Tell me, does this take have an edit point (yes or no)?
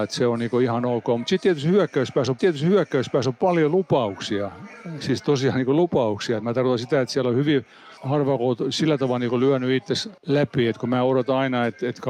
yes